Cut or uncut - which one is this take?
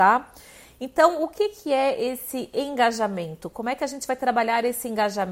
uncut